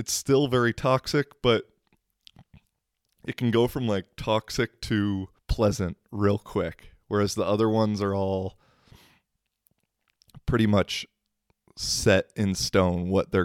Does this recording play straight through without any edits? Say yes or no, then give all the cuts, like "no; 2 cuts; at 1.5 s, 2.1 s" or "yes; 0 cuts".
no; 1 cut; at 5.4 s